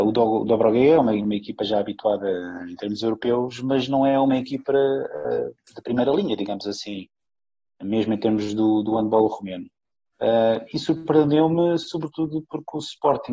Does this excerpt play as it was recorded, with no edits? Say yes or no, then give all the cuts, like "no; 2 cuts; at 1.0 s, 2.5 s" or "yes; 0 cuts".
yes; 0 cuts